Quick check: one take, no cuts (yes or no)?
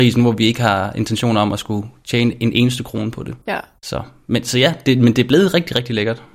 no